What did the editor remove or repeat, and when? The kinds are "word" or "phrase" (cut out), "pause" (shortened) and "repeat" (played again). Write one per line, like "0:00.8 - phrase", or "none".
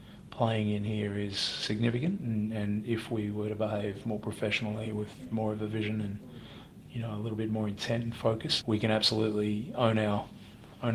0:08.6 - word